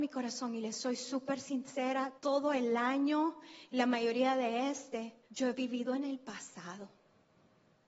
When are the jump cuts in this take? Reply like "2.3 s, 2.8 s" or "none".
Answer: 2.2 s, 5.2 s